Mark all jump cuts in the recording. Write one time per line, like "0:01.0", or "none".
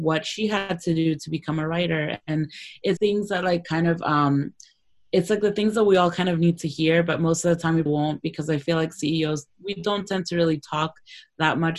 0:03.0
0:07.9